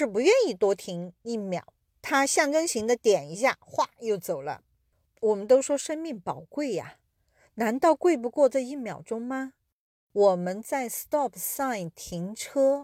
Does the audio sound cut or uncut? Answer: uncut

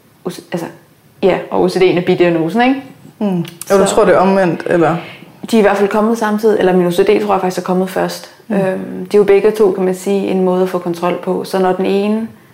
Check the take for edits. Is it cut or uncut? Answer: uncut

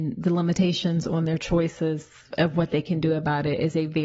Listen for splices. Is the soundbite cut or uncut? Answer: uncut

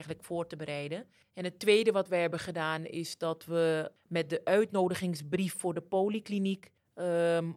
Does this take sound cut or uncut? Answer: uncut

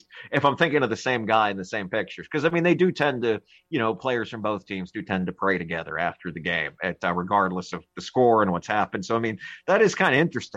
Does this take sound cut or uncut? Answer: uncut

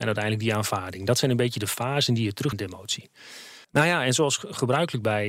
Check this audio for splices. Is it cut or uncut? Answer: cut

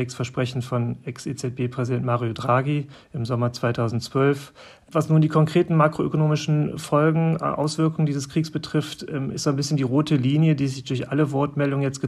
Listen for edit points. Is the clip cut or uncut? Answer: uncut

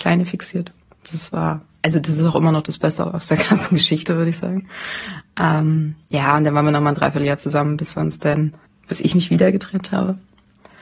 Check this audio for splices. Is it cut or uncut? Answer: cut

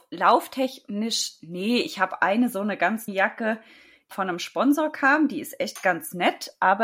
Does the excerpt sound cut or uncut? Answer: cut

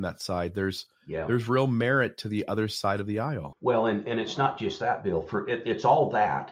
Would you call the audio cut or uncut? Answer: uncut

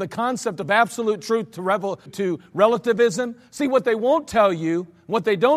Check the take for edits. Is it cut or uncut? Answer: cut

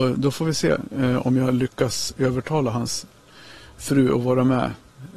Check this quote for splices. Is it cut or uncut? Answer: uncut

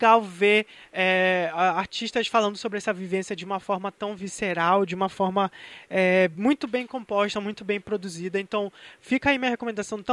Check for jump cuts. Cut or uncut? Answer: uncut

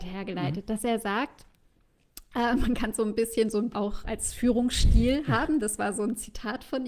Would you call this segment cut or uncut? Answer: cut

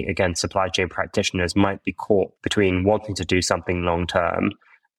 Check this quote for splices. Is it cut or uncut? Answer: cut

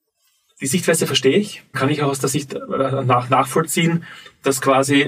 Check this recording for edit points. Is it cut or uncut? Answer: cut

